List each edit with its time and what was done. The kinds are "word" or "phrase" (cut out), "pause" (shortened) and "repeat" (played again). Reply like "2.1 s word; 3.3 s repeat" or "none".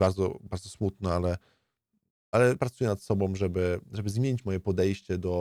2.6 s word